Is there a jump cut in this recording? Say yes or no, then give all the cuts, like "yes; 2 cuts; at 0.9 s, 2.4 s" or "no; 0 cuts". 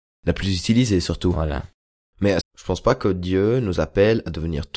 yes; 1 cut; at 2.4 s